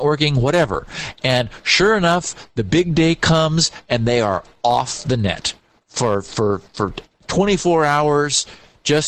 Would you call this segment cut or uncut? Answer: uncut